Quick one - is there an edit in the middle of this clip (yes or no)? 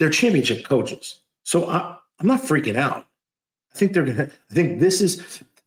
no